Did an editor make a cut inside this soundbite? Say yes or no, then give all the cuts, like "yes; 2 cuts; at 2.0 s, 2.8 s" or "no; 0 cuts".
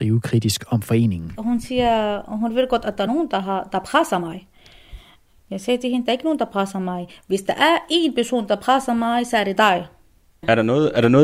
no; 0 cuts